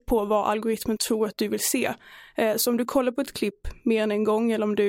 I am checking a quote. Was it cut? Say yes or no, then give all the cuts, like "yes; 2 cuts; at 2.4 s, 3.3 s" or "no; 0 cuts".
no; 0 cuts